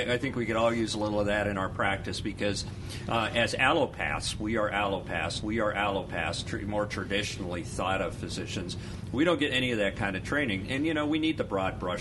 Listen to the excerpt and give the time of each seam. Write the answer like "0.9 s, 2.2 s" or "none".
5.4 s